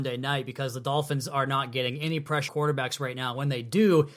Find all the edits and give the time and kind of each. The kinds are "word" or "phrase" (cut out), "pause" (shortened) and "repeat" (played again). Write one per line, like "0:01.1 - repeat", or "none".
0:02.5 - word